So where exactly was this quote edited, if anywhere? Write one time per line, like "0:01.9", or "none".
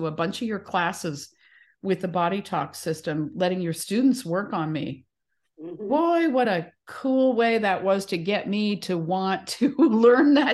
none